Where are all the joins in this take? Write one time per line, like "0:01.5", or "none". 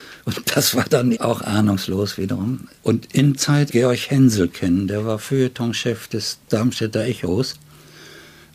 0:01.1
0:02.8
0:03.4
0:03.7